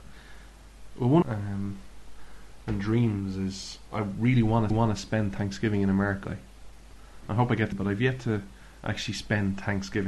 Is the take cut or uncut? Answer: cut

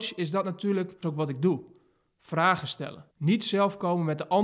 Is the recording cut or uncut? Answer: cut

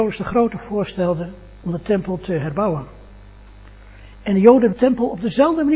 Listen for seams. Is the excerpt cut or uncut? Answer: cut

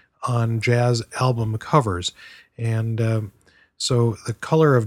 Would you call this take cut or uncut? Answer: uncut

